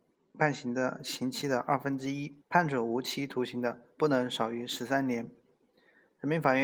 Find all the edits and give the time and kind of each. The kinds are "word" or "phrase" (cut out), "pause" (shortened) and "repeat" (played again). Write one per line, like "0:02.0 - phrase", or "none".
0:02.4 - pause